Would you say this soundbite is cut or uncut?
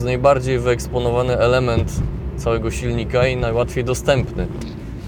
uncut